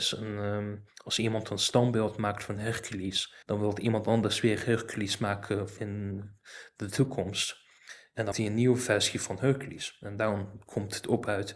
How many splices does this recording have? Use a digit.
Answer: 3